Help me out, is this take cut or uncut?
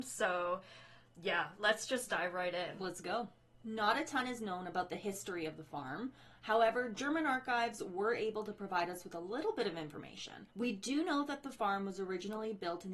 cut